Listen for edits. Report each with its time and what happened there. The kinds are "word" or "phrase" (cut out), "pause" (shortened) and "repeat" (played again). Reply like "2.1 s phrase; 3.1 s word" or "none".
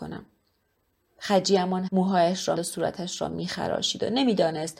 1.9 s word; 2.6 s word